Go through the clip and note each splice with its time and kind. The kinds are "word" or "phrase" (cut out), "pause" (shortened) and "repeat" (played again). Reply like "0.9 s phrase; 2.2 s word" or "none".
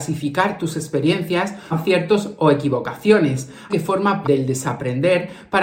1.7 s word; 3.7 s word; 4.2 s word